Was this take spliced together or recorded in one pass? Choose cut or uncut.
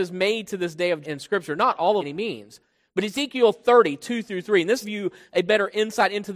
cut